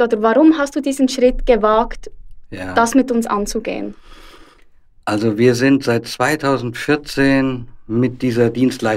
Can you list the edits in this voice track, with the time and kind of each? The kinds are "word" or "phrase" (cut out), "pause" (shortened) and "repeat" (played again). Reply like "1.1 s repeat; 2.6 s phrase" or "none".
none